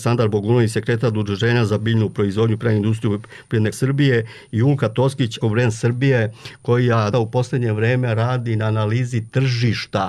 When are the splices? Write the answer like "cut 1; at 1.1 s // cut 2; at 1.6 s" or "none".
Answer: cut 1; at 3.7 s // cut 2; at 5.4 s // cut 3; at 7.1 s